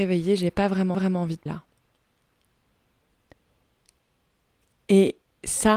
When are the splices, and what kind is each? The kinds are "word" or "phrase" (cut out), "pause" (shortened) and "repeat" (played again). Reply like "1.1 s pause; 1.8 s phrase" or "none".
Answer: 0.9 s repeat; 1.5 s word